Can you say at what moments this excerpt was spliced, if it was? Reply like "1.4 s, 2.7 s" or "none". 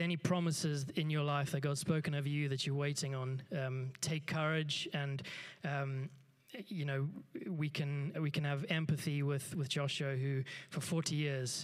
8.1 s